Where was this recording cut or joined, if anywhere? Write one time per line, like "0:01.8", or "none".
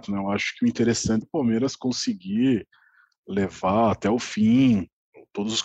0:01.2

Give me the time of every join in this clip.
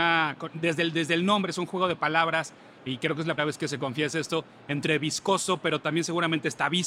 0:03.4

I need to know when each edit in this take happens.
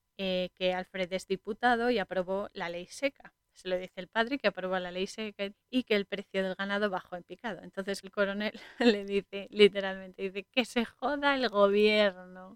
0:03.4
0:05.5
0:08.0

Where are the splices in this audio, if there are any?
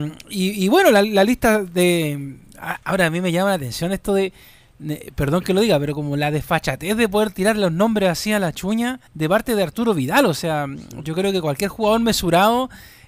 0:09.1

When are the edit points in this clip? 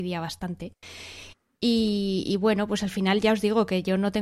none

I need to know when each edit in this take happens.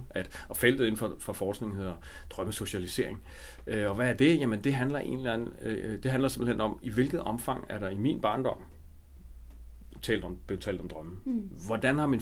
none

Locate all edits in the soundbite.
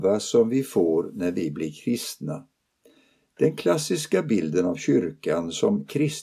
none

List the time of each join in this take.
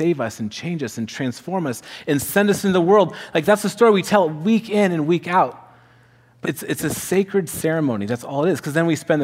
0:06.4

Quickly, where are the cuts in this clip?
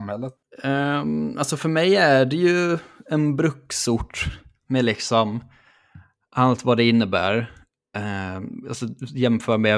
none

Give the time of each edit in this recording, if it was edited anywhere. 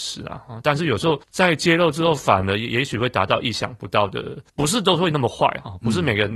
0:01.2
0:04.5

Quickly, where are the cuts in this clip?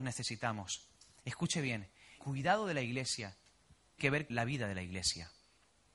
0:02.2
0:04.0
0:04.3

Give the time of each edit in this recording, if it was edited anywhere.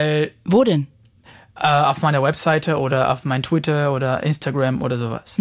none

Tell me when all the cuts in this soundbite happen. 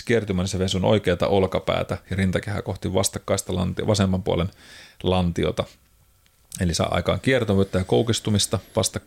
none

